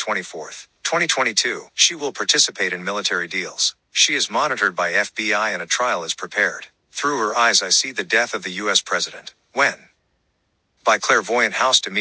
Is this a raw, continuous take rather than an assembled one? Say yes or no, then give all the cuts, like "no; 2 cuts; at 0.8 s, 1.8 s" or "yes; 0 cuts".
no; 1 cut; at 1.7 s